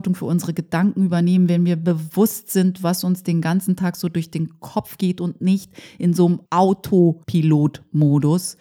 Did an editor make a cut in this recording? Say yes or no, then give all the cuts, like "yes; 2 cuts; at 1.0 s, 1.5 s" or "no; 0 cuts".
yes; 1 cut; at 6.5 s